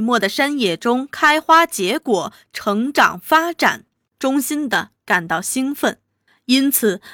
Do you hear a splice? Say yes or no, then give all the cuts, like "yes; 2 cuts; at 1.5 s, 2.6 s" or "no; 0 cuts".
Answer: no; 0 cuts